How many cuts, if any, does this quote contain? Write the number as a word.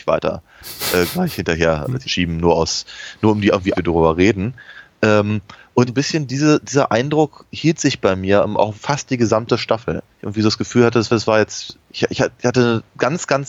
seven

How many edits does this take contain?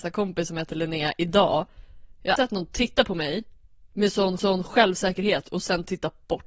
three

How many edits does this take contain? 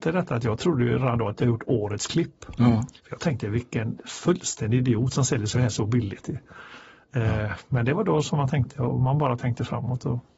two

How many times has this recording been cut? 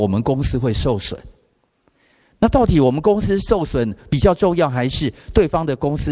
zero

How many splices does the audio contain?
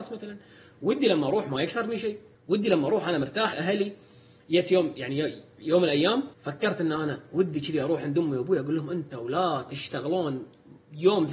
three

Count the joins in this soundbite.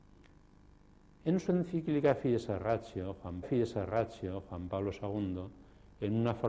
one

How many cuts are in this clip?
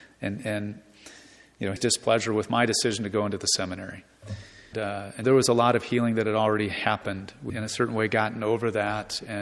four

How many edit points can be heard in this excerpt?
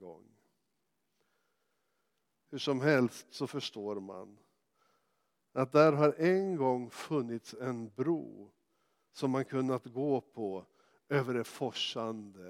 zero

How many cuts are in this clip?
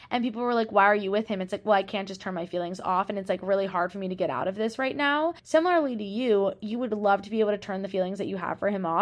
one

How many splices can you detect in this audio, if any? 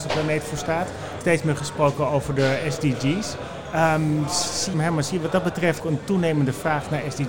three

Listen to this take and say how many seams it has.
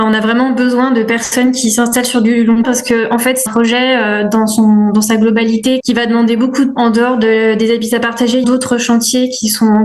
five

